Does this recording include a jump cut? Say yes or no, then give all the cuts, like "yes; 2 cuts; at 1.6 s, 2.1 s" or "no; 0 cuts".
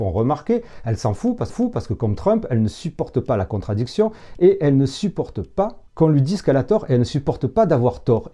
yes; 1 cut; at 1.5 s